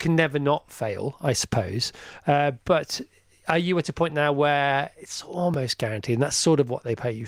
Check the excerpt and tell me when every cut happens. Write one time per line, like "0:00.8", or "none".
none